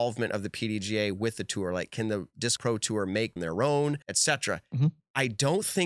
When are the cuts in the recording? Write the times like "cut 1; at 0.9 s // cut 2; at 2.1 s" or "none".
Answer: cut 1; at 2.6 s // cut 2; at 3.4 s // cut 3; at 4.0 s

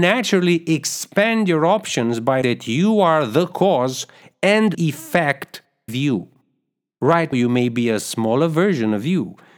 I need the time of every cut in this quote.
cut 1; at 2.4 s // cut 2; at 4.7 s // cut 3; at 5.9 s // cut 4; at 7.3 s

